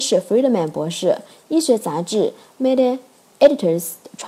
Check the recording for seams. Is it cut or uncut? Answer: uncut